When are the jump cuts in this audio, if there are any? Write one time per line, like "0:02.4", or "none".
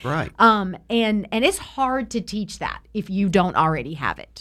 none